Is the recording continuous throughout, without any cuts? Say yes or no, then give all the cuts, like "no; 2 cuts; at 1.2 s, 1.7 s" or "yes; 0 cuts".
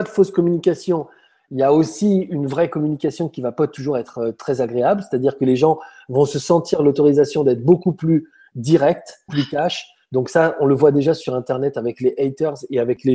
no; 1 cut; at 9.3 s